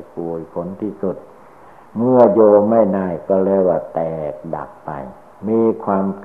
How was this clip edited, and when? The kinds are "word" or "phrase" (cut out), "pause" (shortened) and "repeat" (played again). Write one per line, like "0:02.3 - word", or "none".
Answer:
0:01.9 - pause